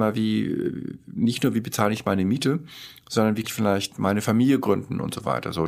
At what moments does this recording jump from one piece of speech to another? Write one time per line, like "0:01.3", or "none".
0:03.4